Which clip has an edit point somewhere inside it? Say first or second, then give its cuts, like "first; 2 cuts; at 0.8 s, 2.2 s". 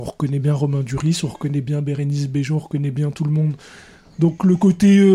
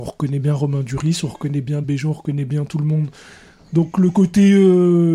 second; 1 cut; at 1.8 s